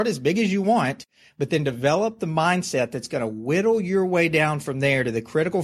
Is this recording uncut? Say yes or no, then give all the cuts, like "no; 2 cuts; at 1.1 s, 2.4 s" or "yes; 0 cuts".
yes; 0 cuts